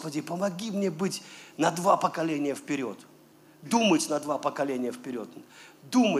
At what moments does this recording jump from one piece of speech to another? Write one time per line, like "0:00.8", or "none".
none